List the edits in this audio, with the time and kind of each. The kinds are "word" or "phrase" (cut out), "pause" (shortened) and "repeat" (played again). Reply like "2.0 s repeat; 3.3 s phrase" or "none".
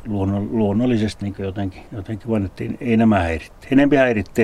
1.2 s word; 1.9 s pause